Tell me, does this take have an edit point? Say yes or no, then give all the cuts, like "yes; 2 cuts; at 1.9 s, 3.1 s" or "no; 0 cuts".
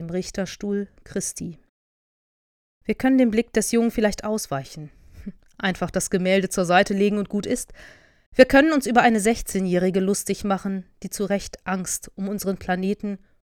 no; 0 cuts